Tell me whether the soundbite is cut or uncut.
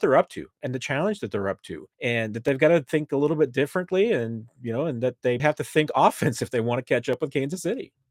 cut